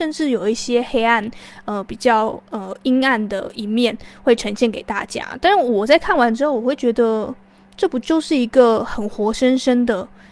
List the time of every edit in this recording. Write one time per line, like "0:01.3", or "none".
none